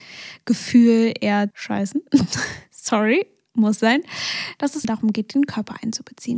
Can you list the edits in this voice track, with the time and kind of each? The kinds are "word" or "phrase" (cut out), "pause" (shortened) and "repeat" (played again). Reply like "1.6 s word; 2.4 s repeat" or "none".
1.5 s word; 4.8 s word